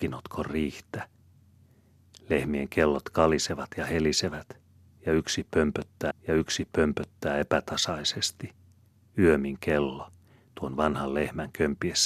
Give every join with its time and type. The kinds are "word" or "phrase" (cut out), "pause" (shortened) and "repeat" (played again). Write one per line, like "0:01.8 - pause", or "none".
0:06.1 - repeat